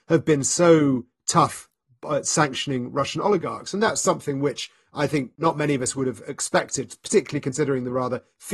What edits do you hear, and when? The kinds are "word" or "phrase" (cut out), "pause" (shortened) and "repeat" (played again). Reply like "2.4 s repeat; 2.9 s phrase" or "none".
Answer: none